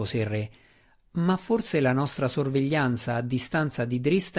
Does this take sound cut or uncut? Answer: uncut